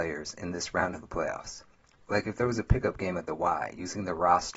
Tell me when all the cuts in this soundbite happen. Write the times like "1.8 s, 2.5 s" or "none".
none